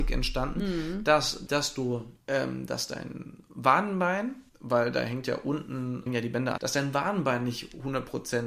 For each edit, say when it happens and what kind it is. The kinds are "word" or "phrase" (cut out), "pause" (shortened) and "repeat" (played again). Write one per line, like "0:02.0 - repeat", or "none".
0:01.5 - word
0:02.2 - pause
0:04.5 - pause
0:06.1 - word
0:06.6 - phrase